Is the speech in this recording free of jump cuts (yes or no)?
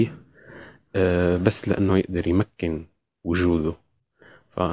yes